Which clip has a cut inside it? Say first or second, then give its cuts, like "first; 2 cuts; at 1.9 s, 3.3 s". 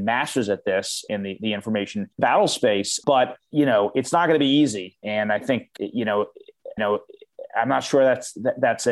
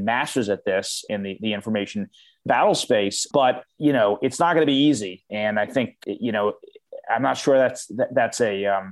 first; 2 cuts; at 2.1 s, 6.8 s